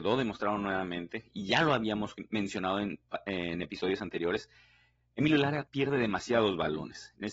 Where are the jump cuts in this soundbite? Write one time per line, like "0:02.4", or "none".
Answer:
none

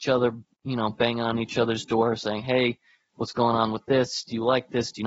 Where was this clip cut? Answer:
none

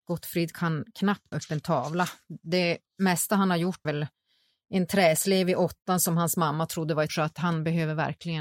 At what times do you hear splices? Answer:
0:01.3
0:03.8
0:07.1

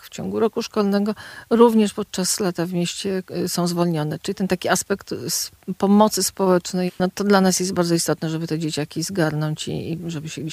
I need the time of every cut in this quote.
0:06.9

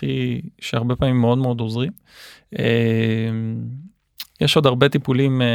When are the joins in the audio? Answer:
none

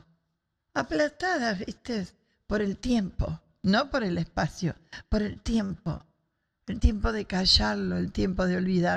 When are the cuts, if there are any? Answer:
none

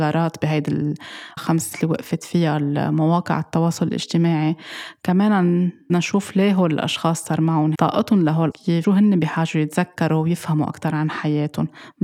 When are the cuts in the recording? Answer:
0:01.4
0:01.7
0:05.9
0:07.7
0:08.5
0:08.8

